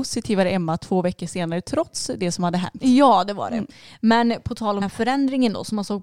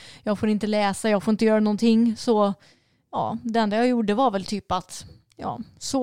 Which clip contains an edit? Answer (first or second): first